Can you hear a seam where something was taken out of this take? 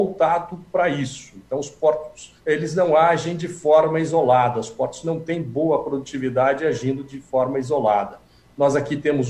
yes; 1 cut; at 2.4 s

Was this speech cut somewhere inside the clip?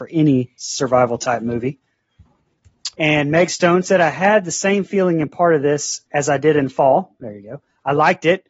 yes; 2 cuts; at 2.9 s, 6.1 s

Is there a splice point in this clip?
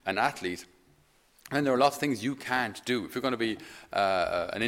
no; 0 cuts

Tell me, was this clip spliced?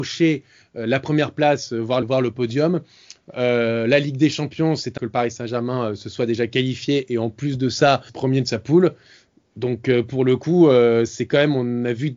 yes; 3 cuts; at 2.0 s, 5.0 s, 8.1 s

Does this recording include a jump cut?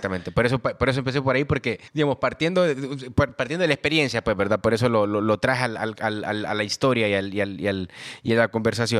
yes; 1 cut; at 1.9 s

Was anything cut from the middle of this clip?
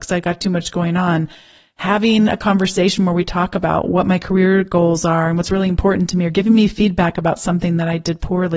no; 0 cuts

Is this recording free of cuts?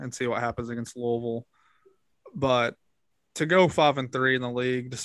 yes; 0 cuts

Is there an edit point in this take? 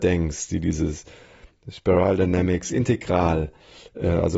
no; 0 cuts

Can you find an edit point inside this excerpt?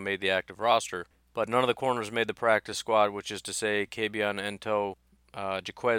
no; 0 cuts

